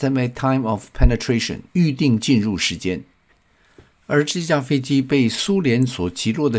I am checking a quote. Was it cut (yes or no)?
yes